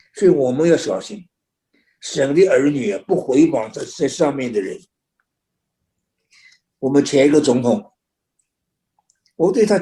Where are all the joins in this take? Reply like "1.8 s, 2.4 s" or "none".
none